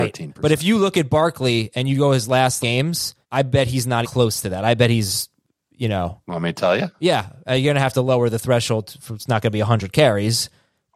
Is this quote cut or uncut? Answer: cut